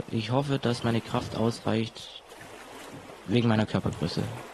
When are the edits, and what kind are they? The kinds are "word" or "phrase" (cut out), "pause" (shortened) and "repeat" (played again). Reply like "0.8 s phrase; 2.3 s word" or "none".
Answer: none